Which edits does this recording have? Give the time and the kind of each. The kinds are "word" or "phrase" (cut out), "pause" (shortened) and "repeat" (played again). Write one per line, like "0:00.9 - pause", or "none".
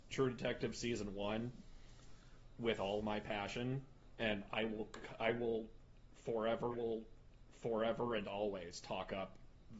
0:03.0 - word
0:06.7 - repeat